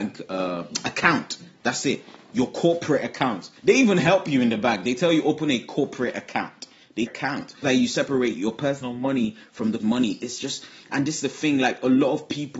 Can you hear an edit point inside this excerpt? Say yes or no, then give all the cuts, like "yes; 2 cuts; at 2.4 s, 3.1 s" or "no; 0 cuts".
yes; 4 cuts; at 3.6 s, 7.1 s, 7.6 s, 9.8 s